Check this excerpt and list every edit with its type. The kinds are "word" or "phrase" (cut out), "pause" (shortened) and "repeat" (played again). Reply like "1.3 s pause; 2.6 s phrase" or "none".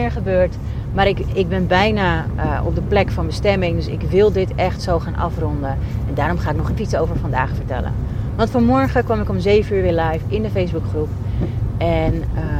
6.8 s word